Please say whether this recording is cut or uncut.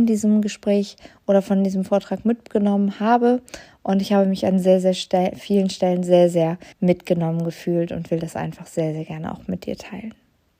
cut